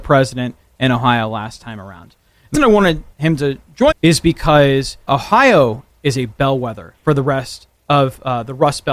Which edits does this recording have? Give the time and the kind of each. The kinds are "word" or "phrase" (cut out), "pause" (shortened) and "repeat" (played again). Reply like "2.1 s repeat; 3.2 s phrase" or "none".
2.5 s word; 3.1 s pause; 3.9 s phrase; 5.1 s word; 7.0 s pause; 7.8 s pause